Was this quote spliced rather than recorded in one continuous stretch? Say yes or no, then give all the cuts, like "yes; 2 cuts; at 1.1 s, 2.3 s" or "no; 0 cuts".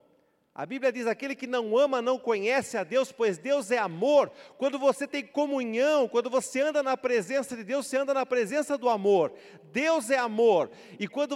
no; 0 cuts